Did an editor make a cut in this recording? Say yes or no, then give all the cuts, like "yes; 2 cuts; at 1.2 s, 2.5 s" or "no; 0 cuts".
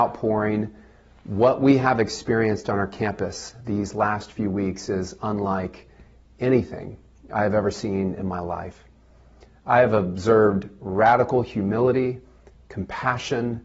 no; 0 cuts